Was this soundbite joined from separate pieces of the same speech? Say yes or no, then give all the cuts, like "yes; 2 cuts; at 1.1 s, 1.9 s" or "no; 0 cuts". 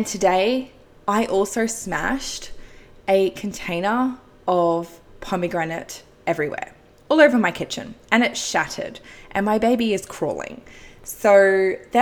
no; 0 cuts